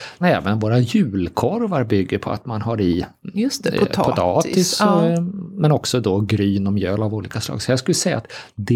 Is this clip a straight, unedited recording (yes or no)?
yes